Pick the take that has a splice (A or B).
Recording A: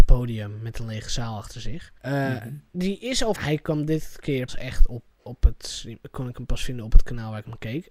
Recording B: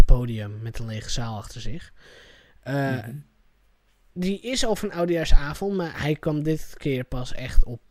A